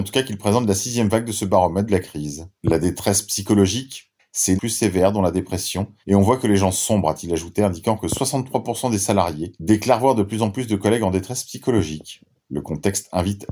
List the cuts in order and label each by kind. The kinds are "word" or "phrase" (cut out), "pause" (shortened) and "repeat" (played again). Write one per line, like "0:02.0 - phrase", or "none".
0:01.9 - phrase
0:02.5 - pause
0:04.6 - phrase
0:06.0 - pause
0:09.6 - pause